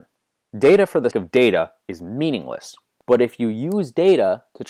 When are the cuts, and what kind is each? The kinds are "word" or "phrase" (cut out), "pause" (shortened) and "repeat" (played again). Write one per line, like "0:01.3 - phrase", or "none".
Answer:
0:01.1 - word